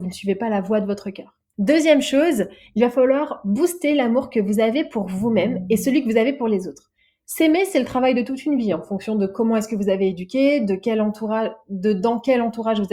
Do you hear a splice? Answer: no; 0 cuts

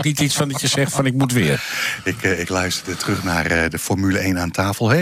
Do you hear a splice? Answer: no; 0 cuts

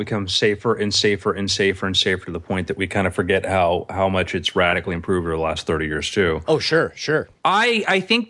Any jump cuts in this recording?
yes; 1 cut; at 7.4 s

